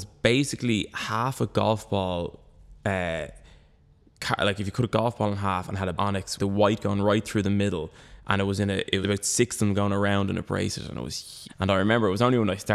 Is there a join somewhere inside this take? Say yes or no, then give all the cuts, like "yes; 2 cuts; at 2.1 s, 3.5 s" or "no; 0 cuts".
yes; 5 cuts; at 2.8 s, 6.0 s, 6.4 s, 9.0 s, 11.5 s